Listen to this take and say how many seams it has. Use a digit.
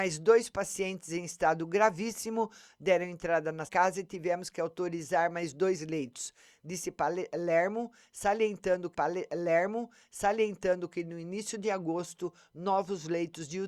2